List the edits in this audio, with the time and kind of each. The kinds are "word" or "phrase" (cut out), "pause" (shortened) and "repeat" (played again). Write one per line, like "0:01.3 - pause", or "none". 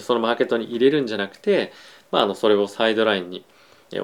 none

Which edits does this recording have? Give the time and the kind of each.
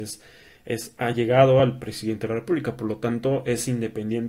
none

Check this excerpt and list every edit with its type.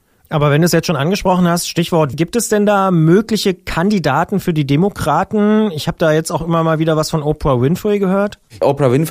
0:02.1 - word

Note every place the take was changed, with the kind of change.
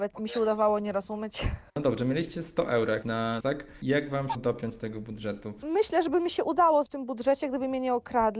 0:01.7 - pause
0:03.0 - word
0:03.4 - phrase
0:04.3 - word
0:06.9 - word

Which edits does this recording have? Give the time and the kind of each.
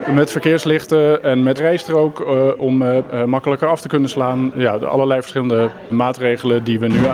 0:01.6 - phrase
0:05.9 - word

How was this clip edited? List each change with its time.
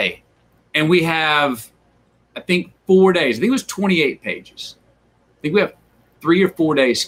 none

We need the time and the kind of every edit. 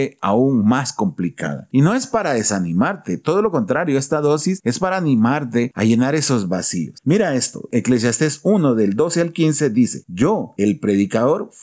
none

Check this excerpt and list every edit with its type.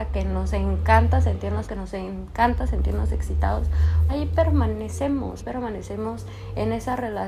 0:01.6 - word
0:04.1 - word
0:05.4 - word

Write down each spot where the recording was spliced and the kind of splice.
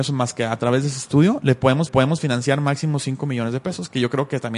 0:01.9 - repeat

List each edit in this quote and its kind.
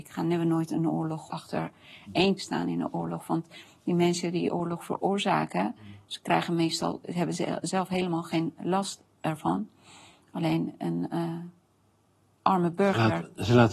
0:01.3 - phrase
0:02.4 - word

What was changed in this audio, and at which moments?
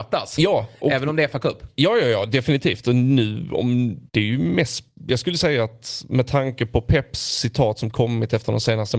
0:04.1 - pause

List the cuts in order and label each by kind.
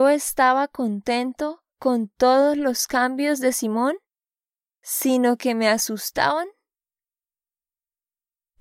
0:01.7 - pause

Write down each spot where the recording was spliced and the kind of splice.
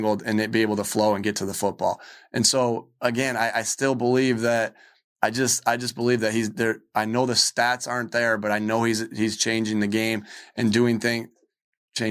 none

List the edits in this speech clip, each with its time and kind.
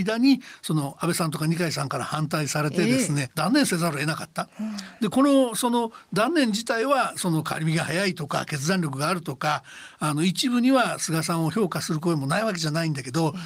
0:03.3 - word

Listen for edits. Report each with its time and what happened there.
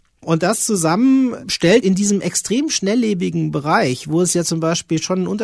0:01.8 - word

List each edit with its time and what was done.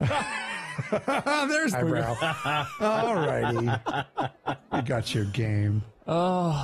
0:01.7 - word

